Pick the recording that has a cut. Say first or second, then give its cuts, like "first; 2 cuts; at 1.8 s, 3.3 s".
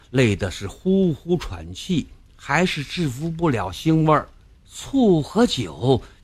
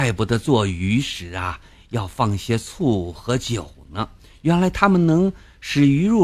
first; 1 cut; at 4.5 s